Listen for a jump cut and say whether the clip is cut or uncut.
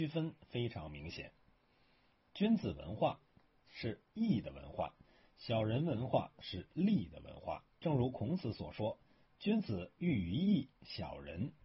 cut